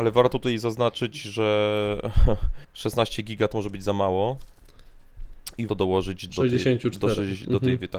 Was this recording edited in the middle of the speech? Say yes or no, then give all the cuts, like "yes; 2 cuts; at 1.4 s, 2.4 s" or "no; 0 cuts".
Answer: yes; 4 cuts; at 2.6 s, 3.5 s, 5.7 s, 6.3 s